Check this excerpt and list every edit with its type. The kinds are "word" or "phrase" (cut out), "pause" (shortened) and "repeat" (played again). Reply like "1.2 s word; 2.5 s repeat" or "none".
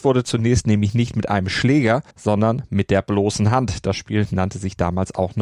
2.1 s pause